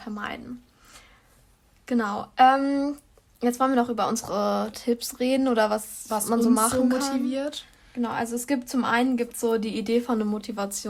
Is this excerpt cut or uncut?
uncut